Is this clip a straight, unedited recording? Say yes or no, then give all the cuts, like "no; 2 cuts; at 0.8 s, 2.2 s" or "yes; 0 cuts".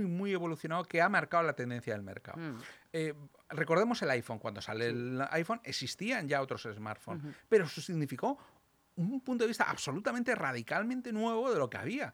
yes; 0 cuts